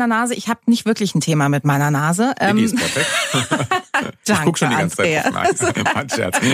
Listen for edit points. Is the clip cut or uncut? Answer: uncut